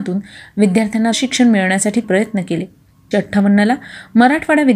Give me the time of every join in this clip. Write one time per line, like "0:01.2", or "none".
0:01.1
0:02.0
0:03.1